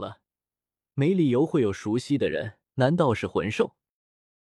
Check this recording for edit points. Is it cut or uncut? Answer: cut